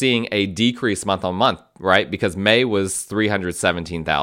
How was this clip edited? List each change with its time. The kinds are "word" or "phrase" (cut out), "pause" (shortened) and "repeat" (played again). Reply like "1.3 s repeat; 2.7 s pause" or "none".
none